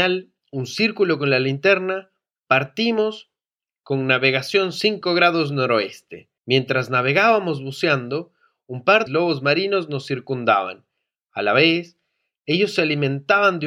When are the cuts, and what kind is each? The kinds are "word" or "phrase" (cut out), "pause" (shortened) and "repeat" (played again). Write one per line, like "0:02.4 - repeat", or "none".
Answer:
0:06.4 - pause
0:09.1 - phrase